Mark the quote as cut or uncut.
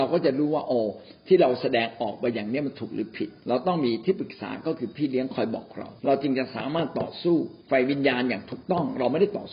cut